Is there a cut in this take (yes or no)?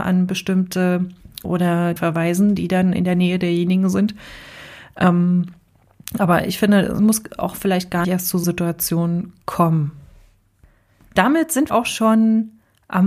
yes